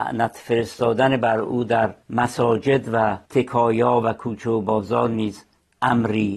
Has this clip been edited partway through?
yes; 2 cuts; at 2.0 s, 3.3 s

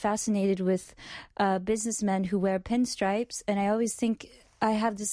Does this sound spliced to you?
no; 0 cuts

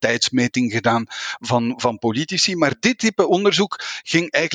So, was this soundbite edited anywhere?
no; 0 cuts

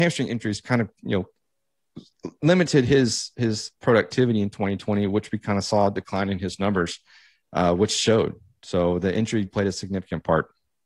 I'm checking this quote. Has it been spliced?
yes; 2 cuts; at 3.8 s, 9.5 s

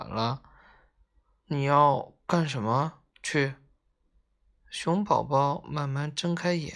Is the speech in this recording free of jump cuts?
no; 1 cut; at 3.1 s

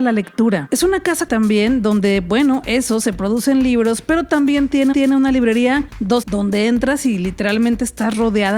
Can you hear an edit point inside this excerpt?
yes; 4 cuts; at 1.3 s, 4.9 s, 5.9 s, 6.2 s

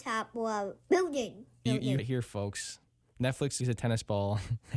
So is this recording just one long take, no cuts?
no; 3 cuts; at 1.7 s, 2.0 s, 3.6 s

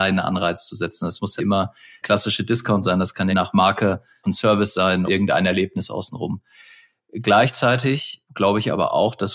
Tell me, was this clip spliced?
yes; 5 cuts; at 1.4 s, 2.0 s, 3.3 s, 4.2 s, 5.1 s

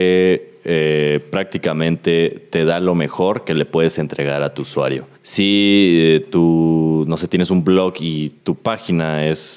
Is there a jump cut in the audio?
yes; 2 cuts; at 5.1 s, 8.4 s

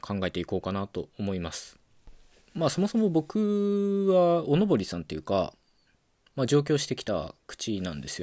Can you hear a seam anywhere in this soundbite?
no; 0 cuts

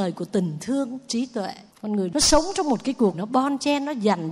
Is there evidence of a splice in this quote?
yes; 2 cuts; at 1.7 s, 3.1 s

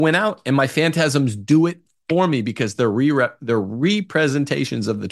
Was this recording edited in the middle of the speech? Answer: no; 0 cuts

